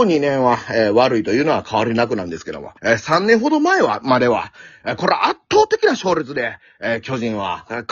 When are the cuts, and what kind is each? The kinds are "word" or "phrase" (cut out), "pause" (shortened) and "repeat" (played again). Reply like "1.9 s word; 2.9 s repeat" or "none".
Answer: 2.8 s pause